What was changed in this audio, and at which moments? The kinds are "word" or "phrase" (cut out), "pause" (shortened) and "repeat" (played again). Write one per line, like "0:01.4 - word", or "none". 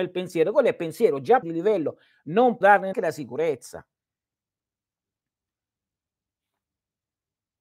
0:01.4 - word
0:02.6 - word
0:02.9 - word

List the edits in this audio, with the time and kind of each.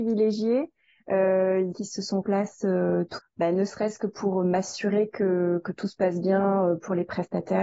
0:01.7 - phrase
0:02.2 - phrase
0:03.2 - word

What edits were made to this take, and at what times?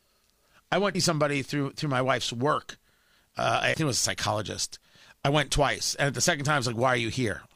0:00.9 - word
0:03.7 - word

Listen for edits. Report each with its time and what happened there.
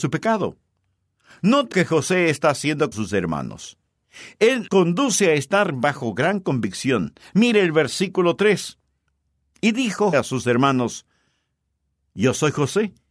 0:01.7 - word
0:02.9 - word
0:04.7 - word
0:10.1 - word

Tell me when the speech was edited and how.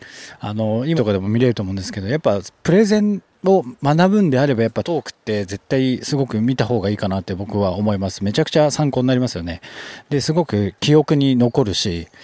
0:01.0 - word
0:04.8 - word

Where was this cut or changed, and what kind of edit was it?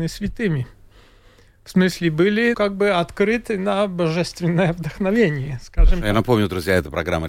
0:02.5 - word

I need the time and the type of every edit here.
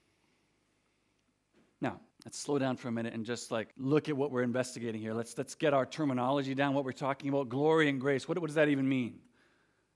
0:02.1 - pause
0:03.7 - pause

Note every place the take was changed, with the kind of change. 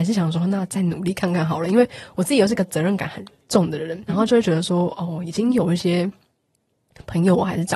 0:04.1 - word

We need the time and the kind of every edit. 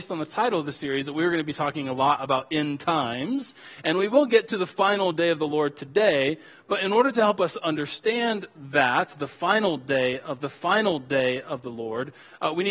0:10.4 - repeat

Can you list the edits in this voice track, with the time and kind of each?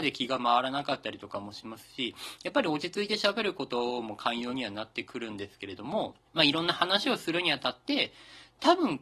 0:06.3 - pause

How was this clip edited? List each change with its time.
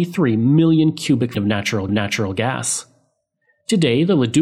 0:01.3 - word
0:01.9 - repeat

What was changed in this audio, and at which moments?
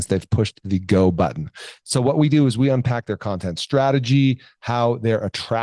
none

